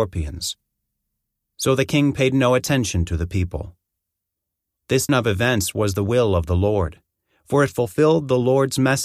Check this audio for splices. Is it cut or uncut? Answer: cut